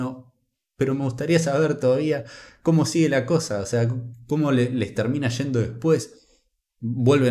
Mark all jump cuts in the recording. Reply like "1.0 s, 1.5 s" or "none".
none